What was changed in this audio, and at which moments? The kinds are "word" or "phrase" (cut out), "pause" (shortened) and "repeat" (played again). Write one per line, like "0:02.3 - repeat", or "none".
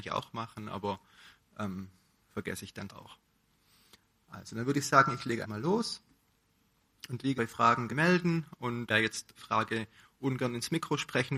0:02.9 - word
0:05.4 - word
0:07.4 - word
0:07.9 - word
0:08.9 - word
0:09.4 - word

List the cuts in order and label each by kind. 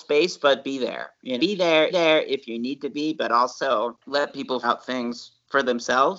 0:01.4 - word
0:01.9 - repeat
0:04.0 - pause
0:04.6 - word

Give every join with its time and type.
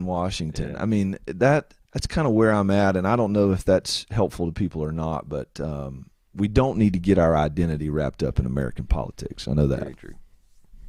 0:01.8 - pause

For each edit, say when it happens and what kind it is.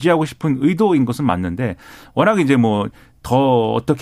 none

